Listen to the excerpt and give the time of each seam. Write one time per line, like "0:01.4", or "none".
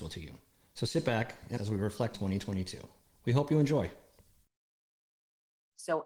0:01.5
0:02.1